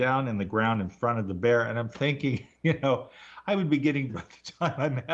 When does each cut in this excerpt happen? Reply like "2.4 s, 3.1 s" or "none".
2.6 s, 4.1 s